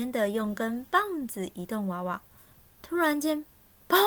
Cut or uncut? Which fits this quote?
uncut